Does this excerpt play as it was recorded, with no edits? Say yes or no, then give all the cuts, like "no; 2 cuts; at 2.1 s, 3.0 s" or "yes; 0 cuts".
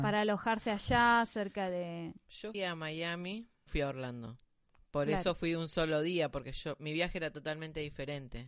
no; 2 cuts; at 2.5 s, 3.7 s